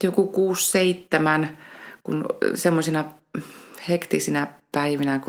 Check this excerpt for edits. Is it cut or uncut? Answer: uncut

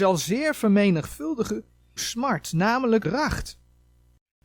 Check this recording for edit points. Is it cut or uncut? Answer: cut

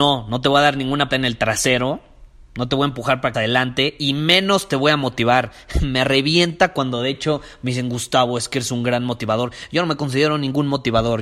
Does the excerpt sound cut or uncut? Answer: cut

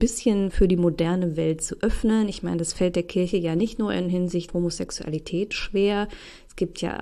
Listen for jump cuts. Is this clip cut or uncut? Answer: cut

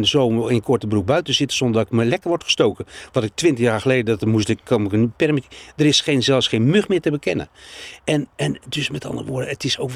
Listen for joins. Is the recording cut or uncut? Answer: uncut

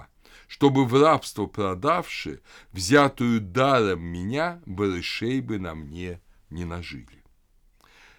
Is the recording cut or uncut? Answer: uncut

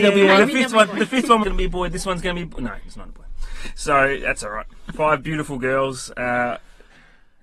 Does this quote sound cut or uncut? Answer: cut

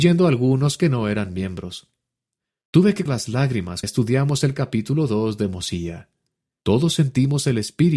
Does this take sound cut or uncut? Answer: cut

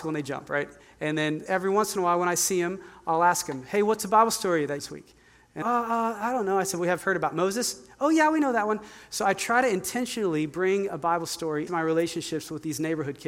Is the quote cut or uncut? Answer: cut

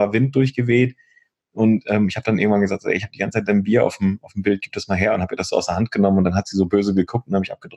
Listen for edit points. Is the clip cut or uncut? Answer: uncut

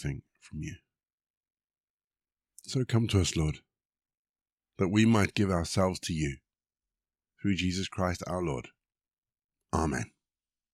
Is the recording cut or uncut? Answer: uncut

